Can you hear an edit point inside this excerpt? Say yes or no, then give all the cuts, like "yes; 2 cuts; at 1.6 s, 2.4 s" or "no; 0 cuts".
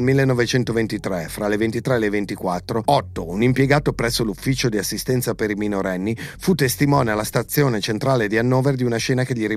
no; 0 cuts